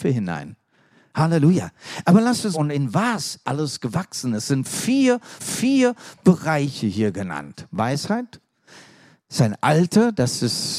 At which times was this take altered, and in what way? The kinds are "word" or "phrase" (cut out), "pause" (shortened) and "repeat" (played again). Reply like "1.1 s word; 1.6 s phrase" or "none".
2.5 s phrase; 3.4 s word; 5.4 s repeat